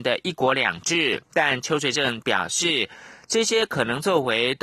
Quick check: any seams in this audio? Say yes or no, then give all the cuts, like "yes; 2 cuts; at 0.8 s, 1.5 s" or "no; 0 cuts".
yes; 1 cut; at 1.2 s